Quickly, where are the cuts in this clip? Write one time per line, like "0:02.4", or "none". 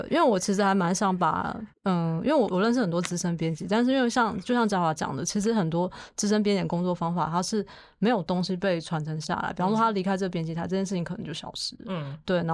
0:01.7